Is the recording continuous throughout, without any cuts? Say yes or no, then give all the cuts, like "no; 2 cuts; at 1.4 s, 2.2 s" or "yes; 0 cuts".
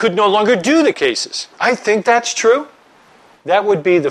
no; 3 cuts; at 0.9 s, 1.5 s, 2.0 s